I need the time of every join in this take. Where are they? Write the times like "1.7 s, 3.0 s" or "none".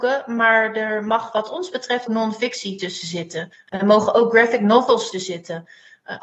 2.1 s, 5.1 s